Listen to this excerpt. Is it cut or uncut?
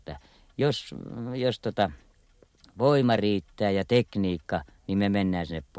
uncut